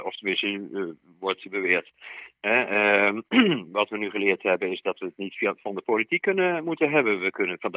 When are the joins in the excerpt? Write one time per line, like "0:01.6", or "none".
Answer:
none